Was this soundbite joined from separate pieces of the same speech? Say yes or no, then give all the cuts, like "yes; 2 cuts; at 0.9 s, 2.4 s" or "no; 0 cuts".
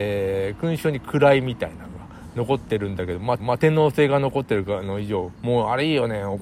yes; 2 cuts; at 3.4 s, 5.3 s